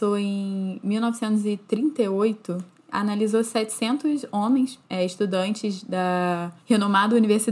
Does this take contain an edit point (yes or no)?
no